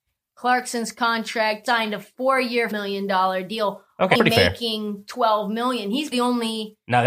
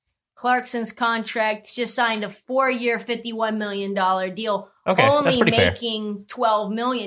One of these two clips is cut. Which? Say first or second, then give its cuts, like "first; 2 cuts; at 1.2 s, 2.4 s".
first; 4 cuts; at 1.7 s, 2.7 s, 4.2 s, 6.1 s